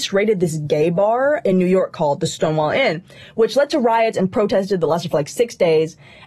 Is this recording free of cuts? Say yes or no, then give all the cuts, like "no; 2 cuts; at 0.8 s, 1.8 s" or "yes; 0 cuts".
yes; 0 cuts